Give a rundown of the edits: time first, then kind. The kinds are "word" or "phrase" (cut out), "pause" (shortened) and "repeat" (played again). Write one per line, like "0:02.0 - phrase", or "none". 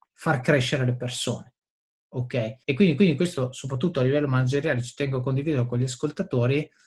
0:02.6 - pause
0:03.0 - repeat